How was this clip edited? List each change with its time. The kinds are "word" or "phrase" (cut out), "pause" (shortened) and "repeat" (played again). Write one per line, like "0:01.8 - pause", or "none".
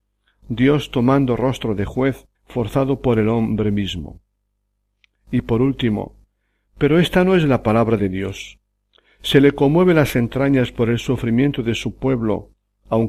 0:02.3 - pause
0:08.0 - word